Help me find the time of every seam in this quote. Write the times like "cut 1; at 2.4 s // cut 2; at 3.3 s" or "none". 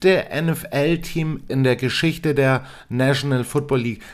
cut 1; at 1.5 s